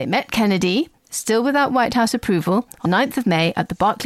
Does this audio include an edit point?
yes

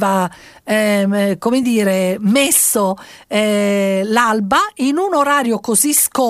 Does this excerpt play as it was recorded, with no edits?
yes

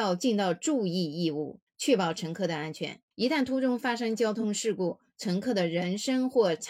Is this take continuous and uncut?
no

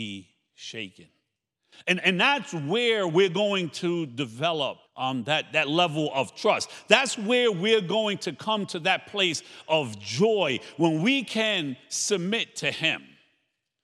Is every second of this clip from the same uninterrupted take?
no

